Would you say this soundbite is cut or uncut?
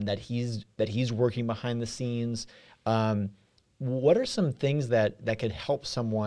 uncut